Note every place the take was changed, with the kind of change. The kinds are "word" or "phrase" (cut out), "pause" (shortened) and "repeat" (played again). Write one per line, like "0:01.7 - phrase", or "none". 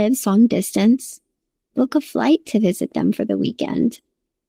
none